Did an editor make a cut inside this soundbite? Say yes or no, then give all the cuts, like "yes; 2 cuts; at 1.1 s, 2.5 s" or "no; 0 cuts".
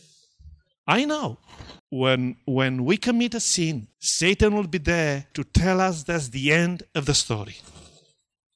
yes; 3 cuts; at 1.8 s, 3.9 s, 5.3 s